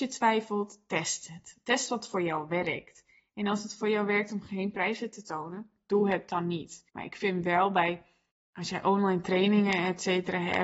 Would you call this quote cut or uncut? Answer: cut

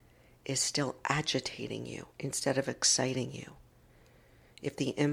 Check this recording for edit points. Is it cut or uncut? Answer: cut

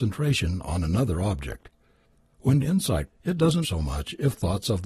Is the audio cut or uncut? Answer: cut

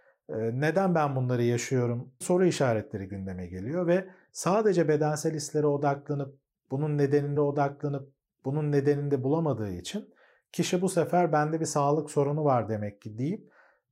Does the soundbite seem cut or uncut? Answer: cut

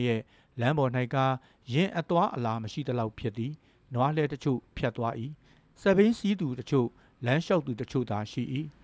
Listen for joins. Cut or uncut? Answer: uncut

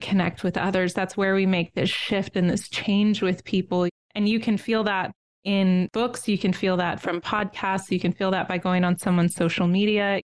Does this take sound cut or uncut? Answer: uncut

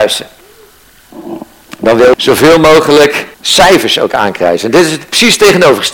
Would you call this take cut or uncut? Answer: cut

